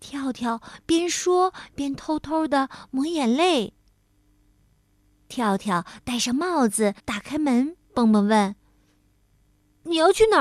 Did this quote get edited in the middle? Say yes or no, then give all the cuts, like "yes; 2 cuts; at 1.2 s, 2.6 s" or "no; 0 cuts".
yes; 2 cuts; at 7.0 s, 7.8 s